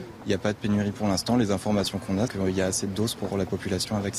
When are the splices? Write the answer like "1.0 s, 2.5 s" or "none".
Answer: 2.3 s, 3.3 s